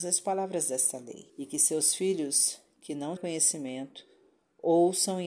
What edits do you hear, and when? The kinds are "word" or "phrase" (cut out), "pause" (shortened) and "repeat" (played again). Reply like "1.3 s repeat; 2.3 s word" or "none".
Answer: 1.3 s pause; 3.2 s word